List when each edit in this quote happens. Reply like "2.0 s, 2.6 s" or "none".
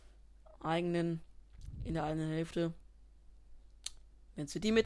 none